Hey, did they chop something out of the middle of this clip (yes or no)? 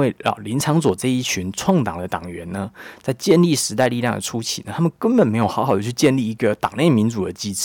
no